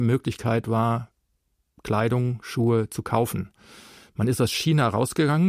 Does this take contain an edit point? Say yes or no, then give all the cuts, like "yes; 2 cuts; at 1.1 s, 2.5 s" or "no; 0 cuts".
no; 0 cuts